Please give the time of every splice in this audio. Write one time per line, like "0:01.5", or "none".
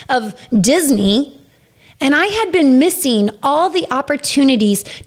none